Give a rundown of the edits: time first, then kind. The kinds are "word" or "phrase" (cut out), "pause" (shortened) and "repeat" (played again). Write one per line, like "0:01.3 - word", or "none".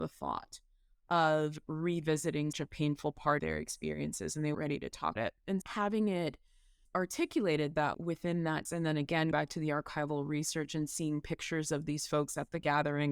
0:02.5 - word
0:03.4 - word
0:04.5 - word
0:05.2 - word
0:05.6 - word
0:06.9 - word
0:07.9 - word
0:08.7 - word
0:09.3 - word